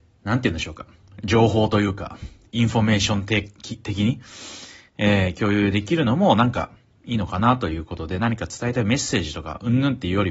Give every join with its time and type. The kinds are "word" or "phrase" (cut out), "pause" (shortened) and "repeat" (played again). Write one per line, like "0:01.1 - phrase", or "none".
none